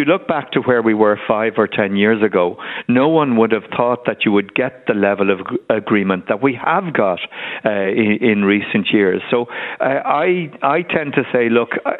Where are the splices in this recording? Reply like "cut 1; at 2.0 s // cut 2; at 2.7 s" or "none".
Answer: none